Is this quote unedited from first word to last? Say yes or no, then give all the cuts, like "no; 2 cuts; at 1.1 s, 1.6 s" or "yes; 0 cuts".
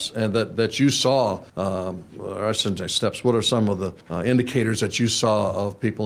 no; 2 cuts; at 1.5 s, 4.0 s